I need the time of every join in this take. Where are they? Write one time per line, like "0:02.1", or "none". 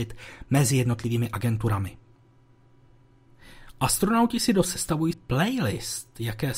0:04.6
0:05.1